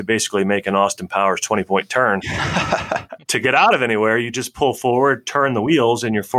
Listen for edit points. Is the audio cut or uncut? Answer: uncut